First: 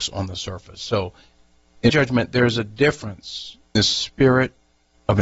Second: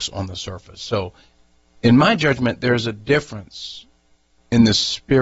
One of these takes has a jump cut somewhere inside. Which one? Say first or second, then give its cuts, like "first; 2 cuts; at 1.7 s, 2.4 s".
first; 2 cuts; at 1.9 s, 3.8 s